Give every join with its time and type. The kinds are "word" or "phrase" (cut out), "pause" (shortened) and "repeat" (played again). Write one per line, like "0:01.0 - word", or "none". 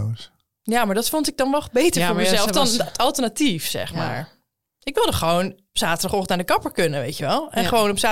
none